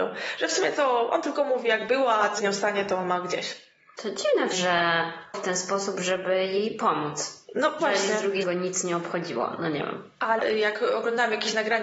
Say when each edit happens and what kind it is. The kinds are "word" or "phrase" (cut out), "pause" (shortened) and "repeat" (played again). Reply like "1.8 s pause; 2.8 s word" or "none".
2.4 s word; 4.5 s word; 5.3 s word; 7.8 s word; 8.4 s word; 10.4 s word